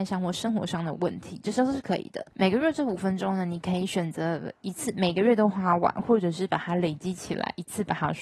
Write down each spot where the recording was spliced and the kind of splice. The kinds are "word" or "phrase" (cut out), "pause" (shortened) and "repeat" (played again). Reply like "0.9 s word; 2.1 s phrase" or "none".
2.3 s pause